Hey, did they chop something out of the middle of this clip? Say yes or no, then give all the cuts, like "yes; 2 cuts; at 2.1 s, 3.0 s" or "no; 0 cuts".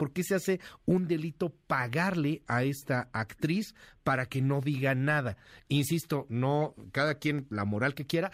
no; 0 cuts